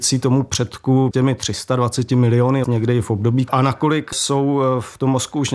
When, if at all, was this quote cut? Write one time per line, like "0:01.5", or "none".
0:01.1
0:02.6
0:03.5

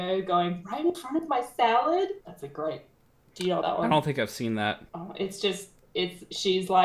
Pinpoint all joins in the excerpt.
0:02.2
0:03.1
0:03.6
0:04.9

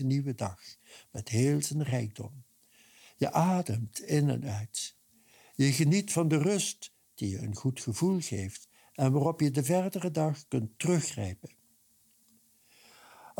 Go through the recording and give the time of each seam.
none

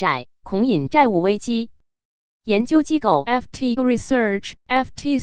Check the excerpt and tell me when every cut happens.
0:03.8

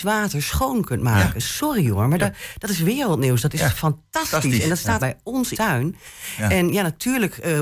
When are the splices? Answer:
0:05.0
0:05.5

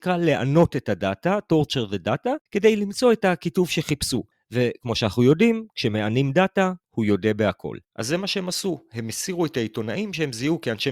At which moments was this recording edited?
0:02.5
0:04.3
0:06.8
0:07.8

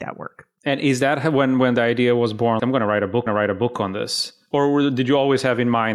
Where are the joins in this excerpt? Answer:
0:02.6
0:03.3

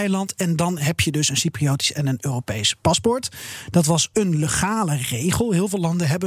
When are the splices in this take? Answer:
none

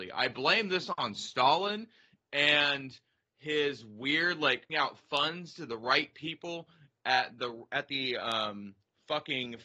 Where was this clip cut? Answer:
0:04.7

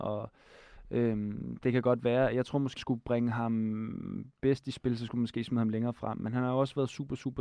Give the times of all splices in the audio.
0:02.8

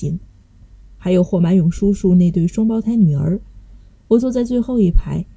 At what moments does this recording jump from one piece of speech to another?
none

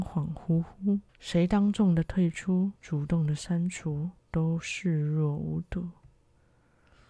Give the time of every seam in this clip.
0:01.1
0:02.8
0:04.2

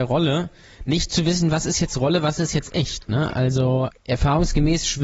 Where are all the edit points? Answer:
0:03.9

